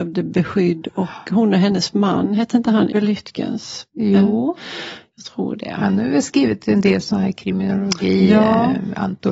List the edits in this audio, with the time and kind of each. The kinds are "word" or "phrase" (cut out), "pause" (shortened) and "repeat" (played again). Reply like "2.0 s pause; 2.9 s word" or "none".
2.9 s word